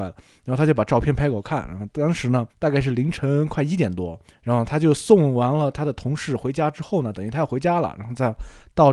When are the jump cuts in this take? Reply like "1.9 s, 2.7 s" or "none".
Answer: 2.5 s, 4.3 s